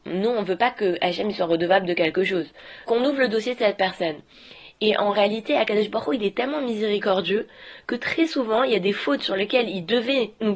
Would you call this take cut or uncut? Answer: cut